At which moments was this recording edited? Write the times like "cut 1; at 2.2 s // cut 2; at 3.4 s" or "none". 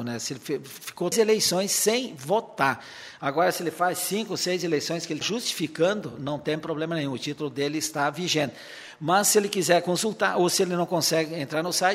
cut 1; at 1.1 s // cut 2; at 5.2 s